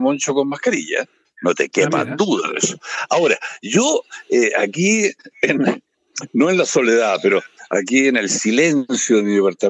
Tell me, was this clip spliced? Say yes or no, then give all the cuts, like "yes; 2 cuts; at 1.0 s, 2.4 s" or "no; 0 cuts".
no; 0 cuts